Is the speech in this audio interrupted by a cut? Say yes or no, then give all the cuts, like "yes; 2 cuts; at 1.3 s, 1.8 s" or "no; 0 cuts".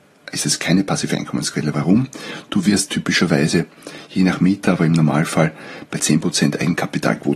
no; 0 cuts